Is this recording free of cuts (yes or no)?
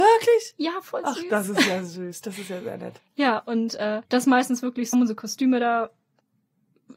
no